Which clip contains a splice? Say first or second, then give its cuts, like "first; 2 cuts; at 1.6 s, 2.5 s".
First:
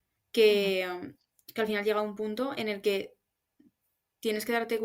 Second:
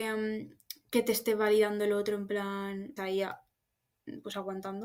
second; 1 cut; at 3.0 s